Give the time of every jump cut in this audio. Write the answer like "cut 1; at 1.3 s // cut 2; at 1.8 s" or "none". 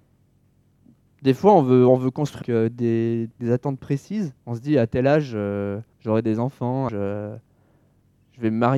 cut 1; at 2.4 s // cut 2; at 3.4 s // cut 3; at 4.4 s // cut 4; at 5.9 s // cut 5; at 6.9 s